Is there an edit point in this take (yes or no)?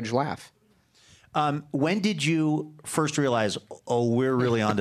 no